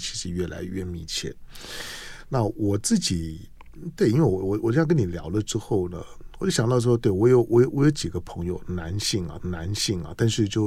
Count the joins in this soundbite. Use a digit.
1